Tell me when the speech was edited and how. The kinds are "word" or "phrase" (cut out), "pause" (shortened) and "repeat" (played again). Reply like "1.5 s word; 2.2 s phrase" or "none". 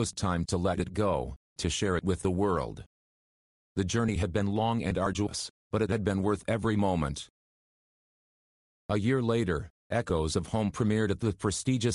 none

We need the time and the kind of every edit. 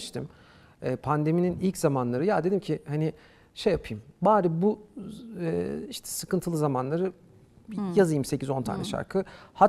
none

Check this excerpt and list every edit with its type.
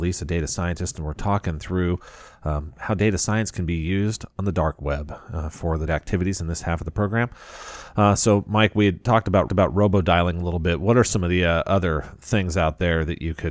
5.9 s phrase; 9.5 s repeat

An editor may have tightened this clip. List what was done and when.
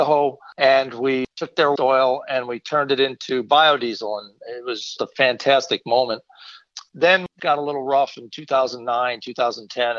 1.8 s word; 5.0 s word; 7.4 s phrase

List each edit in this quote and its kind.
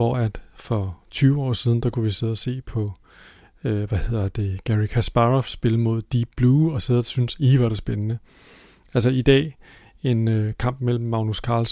none

